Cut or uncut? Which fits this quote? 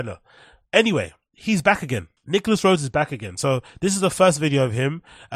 cut